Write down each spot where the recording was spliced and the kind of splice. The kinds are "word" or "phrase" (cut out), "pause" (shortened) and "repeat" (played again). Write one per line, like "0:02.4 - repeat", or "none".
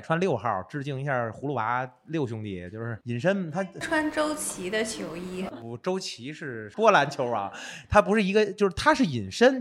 0:05.5 - phrase